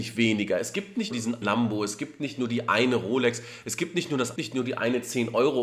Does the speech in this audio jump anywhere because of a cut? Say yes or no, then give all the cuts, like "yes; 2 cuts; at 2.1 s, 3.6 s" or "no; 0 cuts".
yes; 3 cuts; at 1.1 s, 1.4 s, 4.4 s